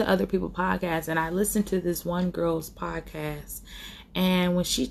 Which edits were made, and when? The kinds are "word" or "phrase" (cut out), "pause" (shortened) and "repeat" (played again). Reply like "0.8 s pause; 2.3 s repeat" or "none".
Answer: none